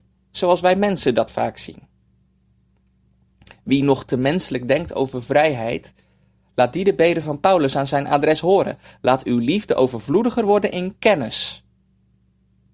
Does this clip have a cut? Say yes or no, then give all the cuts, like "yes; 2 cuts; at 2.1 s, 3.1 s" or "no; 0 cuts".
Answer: no; 0 cuts